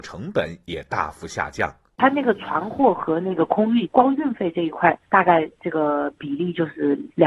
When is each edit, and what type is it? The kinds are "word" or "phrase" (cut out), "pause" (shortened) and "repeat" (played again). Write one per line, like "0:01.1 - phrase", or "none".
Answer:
none